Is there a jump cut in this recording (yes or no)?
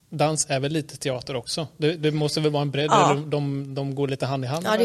no